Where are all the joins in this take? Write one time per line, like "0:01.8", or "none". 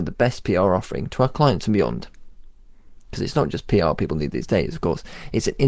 none